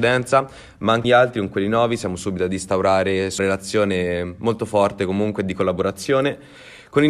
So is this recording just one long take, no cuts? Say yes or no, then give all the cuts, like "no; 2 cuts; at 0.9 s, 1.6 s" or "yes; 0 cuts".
no; 2 cuts; at 1.0 s, 3.4 s